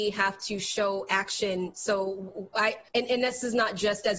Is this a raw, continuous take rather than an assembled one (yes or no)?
no